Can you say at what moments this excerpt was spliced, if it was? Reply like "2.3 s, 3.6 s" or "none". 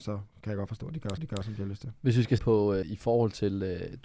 1.2 s, 2.4 s, 2.8 s